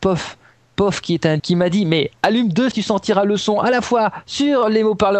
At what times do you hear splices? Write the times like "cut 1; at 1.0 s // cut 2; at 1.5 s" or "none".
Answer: cut 1; at 1.4 s // cut 2; at 2.7 s